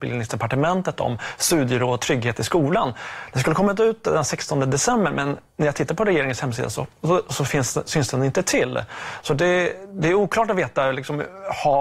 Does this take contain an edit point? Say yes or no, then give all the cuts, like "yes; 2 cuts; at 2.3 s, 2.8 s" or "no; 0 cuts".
no; 0 cuts